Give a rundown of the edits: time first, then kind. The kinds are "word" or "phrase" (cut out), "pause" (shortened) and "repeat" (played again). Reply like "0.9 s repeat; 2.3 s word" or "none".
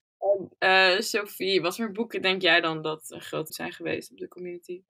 3.5 s word